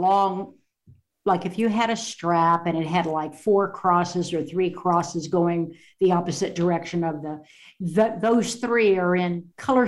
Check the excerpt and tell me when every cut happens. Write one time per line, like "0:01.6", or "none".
none